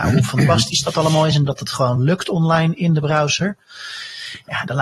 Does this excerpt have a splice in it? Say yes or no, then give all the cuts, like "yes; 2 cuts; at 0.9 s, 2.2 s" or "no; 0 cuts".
no; 0 cuts